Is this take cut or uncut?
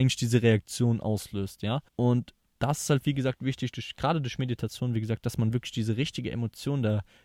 cut